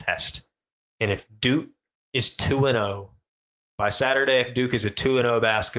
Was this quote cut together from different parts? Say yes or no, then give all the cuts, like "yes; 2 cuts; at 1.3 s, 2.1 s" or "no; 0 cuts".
no; 0 cuts